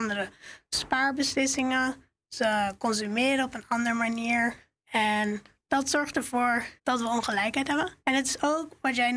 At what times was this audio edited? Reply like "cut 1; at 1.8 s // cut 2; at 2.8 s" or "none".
cut 1; at 4.8 s // cut 2; at 6.8 s // cut 3; at 8.0 s